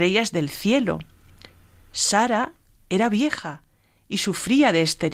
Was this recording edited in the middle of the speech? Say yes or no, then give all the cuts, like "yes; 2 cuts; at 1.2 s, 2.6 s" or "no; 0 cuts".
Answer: no; 0 cuts